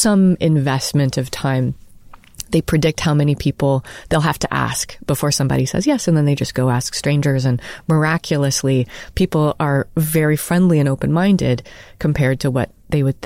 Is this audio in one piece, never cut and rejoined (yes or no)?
yes